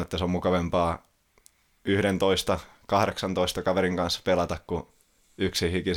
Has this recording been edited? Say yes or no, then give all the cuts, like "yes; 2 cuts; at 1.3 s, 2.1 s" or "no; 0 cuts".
no; 0 cuts